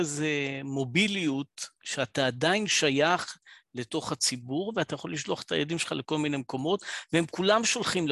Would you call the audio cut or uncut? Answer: cut